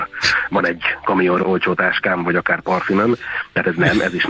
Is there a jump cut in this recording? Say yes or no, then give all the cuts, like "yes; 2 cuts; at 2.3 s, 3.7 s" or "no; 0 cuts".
yes; 1 cut; at 1.4 s